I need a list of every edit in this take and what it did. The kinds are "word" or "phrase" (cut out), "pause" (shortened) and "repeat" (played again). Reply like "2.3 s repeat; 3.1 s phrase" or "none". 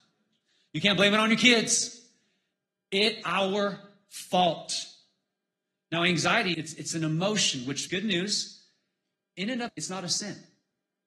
3.2 s word; 6.5 s word; 7.9 s word; 9.7 s word